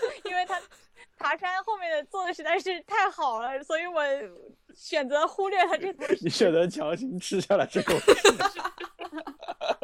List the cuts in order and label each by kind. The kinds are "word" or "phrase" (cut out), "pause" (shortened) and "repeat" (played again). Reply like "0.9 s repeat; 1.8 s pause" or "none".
8.4 s word

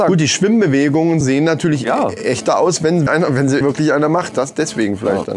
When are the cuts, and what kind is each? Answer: 1.2 s word; 3.1 s word; 3.6 s word

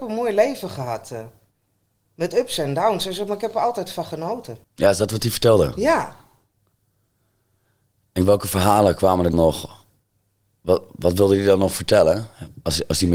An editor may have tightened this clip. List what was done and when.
4.6 s pause; 9.3 s word

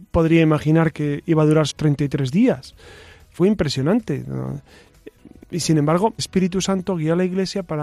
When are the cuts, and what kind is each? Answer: 0.9 s word; 1.7 s word; 3.4 s word; 6.2 s word

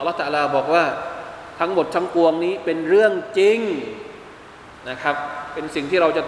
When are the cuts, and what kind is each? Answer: none

